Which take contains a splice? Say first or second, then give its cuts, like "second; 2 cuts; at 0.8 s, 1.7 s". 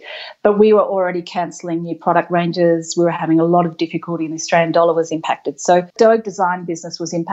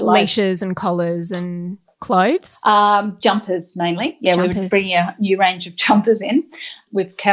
first; 1 cut; at 5.9 s